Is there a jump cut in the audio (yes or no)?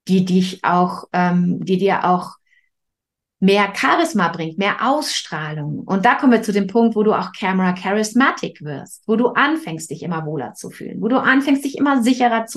no